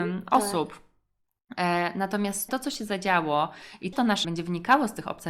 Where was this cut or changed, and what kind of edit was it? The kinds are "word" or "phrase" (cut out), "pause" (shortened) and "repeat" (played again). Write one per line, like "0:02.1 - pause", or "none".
0:02.5 - word
0:03.9 - word
0:04.2 - phrase